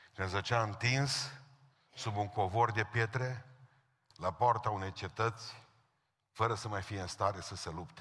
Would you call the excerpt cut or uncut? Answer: uncut